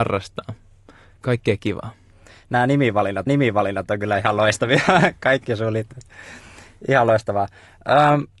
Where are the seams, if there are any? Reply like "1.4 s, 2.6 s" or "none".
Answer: 1.2 s, 3.3 s